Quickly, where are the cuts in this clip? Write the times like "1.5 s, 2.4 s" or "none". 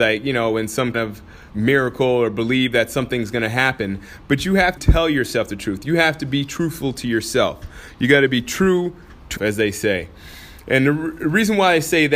0.9 s, 1.5 s, 4.8 s, 9.4 s